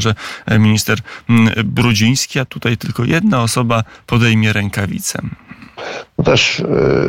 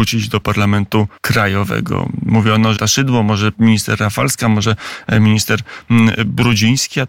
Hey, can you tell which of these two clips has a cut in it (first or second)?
second